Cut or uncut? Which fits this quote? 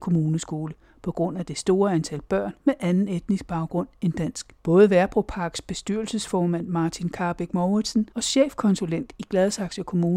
cut